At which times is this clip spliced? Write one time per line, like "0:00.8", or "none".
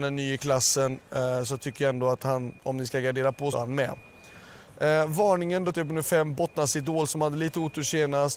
0:02.6
0:03.5
0:05.7